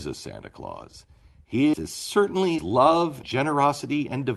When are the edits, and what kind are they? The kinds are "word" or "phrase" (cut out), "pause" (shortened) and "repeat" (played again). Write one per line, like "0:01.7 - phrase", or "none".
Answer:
0:01.7 - word
0:02.6 - word
0:03.2 - word